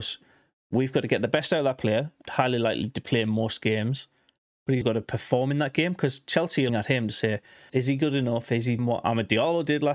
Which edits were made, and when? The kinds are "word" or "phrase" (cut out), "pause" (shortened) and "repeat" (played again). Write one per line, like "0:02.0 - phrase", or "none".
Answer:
0:02.2 - word
0:04.8 - word
0:06.7 - word
0:07.7 - word
0:08.8 - word